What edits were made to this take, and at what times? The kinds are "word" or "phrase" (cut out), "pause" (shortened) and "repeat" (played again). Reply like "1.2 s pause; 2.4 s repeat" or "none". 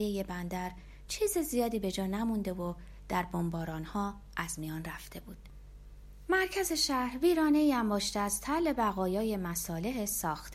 none